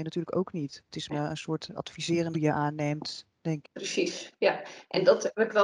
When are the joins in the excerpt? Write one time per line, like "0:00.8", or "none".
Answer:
0:01.1
0:02.3
0:03.6